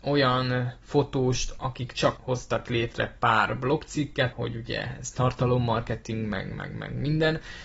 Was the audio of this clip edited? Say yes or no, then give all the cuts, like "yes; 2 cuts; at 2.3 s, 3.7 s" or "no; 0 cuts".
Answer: yes; 3 cuts; at 1.6 s, 2.2 s, 4.3 s